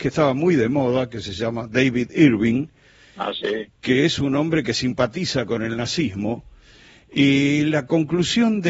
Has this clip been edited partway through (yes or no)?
no